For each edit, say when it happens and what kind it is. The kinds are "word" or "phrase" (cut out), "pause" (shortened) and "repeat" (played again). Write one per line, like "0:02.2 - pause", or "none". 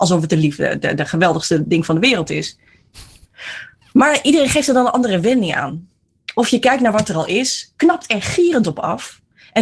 none